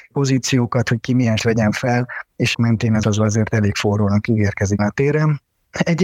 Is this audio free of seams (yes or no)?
no